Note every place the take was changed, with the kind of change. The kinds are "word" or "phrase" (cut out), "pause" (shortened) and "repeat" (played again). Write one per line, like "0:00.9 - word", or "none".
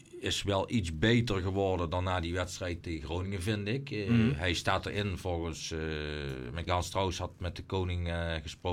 0:02.8 - word
0:06.7 - word